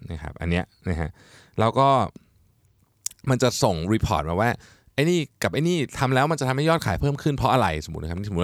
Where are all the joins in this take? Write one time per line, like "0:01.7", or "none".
none